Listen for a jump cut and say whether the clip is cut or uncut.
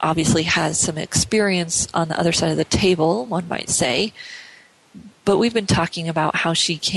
uncut